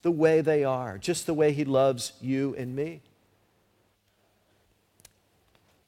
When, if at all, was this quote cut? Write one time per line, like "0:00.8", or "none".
none